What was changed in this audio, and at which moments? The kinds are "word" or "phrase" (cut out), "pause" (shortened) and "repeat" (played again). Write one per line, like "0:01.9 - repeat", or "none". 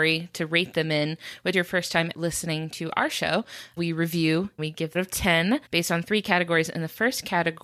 0:01.5 - phrase
0:02.1 - word
0:03.8 - word
0:04.6 - phrase
0:04.9 - phrase
0:05.7 - pause